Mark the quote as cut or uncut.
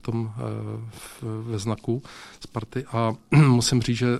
uncut